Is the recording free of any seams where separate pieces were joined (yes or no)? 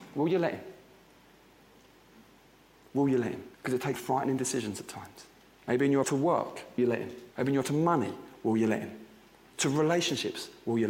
no